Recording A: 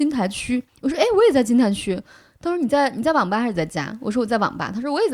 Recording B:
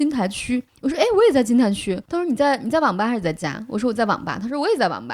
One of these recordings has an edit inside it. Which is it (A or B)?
B